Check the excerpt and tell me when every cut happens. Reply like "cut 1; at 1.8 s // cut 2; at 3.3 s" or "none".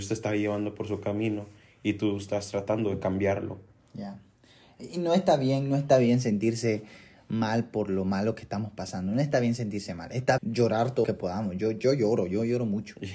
cut 1; at 10.4 s // cut 2; at 11.0 s